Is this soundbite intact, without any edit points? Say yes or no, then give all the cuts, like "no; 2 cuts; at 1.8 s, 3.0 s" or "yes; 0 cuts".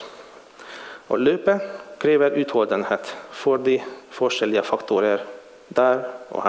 yes; 0 cuts